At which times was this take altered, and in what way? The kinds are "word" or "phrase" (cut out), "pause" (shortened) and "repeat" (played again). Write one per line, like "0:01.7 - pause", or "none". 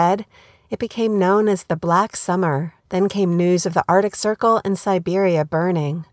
0:02.8 - pause